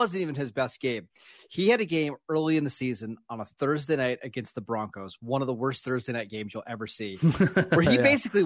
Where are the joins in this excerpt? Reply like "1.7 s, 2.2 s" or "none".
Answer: none

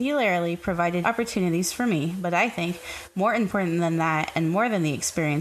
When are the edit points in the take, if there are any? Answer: 1.0 s

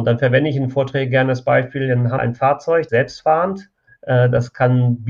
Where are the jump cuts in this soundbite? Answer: 2.2 s, 2.9 s, 3.9 s

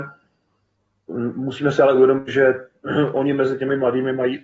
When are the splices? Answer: none

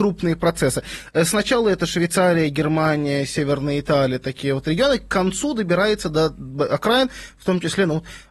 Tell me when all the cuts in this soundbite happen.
none

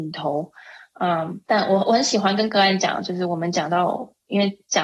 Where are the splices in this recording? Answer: 1.4 s

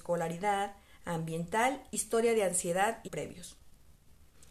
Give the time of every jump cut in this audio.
3.1 s

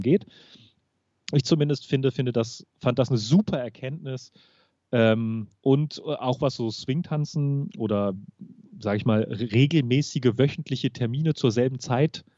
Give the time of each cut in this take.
5.6 s

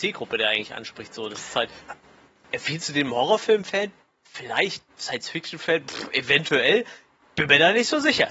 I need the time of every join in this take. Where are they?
none

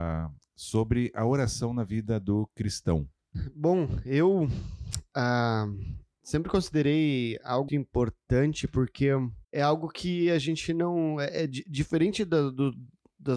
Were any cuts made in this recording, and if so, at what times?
7.7 s, 9.4 s

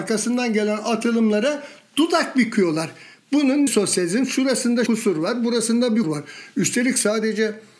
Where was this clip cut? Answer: 3.7 s, 4.9 s, 6.0 s

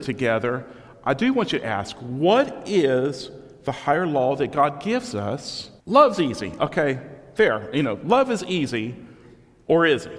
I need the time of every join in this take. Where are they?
5.8 s

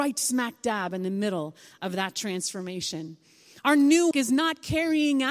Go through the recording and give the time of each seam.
4.1 s

